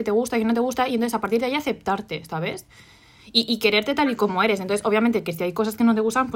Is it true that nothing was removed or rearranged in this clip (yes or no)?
yes